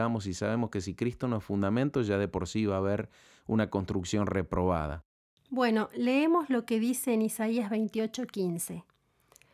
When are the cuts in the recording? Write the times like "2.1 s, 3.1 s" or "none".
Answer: none